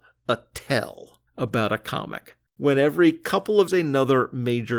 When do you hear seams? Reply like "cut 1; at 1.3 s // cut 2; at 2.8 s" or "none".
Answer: cut 1; at 1.3 s // cut 2; at 2.5 s // cut 3; at 3.7 s